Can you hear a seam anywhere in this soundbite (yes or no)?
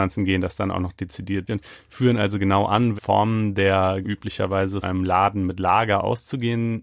yes